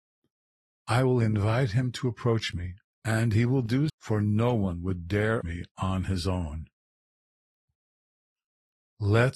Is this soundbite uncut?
no; 2 cuts; at 3.9 s, 5.4 s

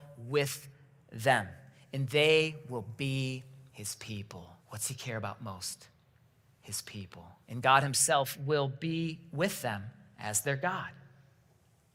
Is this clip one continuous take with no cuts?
no; 2 cuts; at 4.6 s, 7.4 s

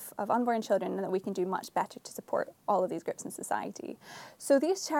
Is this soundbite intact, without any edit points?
yes; 0 cuts

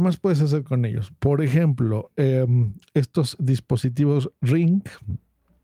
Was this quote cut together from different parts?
no; 0 cuts

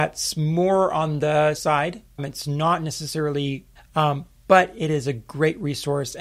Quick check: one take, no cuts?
no; 3 cuts; at 1.6 s, 2.2 s, 3.8 s

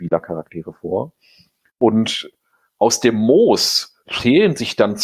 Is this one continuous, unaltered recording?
yes; 0 cuts

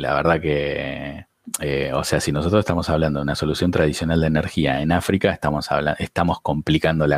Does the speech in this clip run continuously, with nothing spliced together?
yes; 0 cuts

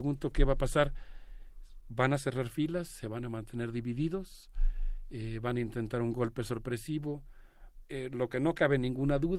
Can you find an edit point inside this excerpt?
no; 0 cuts

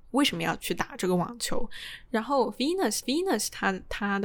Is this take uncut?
no; 1 cut; at 3.0 s

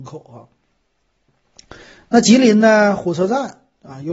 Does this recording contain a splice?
no; 0 cuts

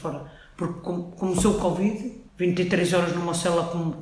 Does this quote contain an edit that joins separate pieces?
yes; 1 cut; at 2.3 s

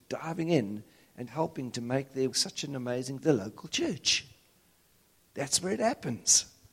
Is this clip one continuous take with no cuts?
no; 3 cuts; at 1.3 s, 2.3 s, 3.2 s

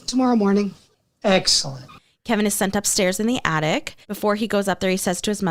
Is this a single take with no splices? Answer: no; 1 cut; at 4.0 s

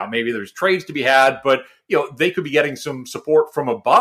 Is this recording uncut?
yes; 0 cuts

